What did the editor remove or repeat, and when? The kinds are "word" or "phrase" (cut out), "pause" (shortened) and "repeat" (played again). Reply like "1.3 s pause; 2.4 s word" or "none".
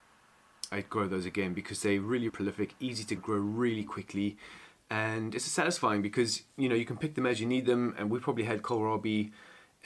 2.3 s word; 3.2 s word